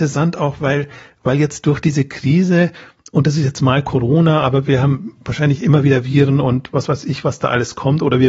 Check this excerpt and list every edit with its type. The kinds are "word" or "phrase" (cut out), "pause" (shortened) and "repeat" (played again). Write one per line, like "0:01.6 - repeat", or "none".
none